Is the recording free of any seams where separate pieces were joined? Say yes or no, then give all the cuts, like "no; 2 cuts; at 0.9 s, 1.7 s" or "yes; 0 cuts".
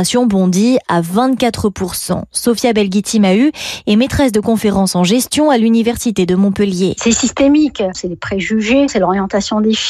yes; 0 cuts